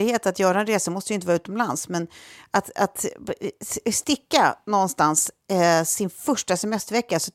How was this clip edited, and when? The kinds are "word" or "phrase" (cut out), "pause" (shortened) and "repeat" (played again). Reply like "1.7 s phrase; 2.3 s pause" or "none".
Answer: none